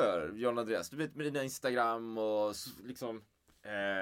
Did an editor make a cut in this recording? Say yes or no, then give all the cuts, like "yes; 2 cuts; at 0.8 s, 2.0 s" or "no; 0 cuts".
no; 0 cuts